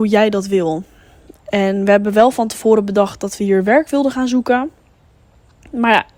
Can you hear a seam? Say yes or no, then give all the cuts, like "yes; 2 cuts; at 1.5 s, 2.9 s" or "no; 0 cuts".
no; 0 cuts